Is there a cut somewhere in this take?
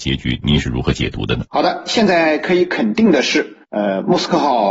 yes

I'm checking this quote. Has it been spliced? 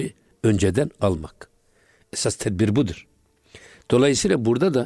no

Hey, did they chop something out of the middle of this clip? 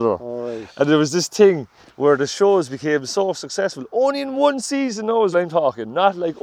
yes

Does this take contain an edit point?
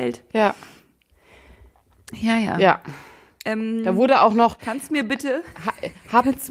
no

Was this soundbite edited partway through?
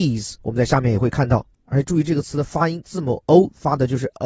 yes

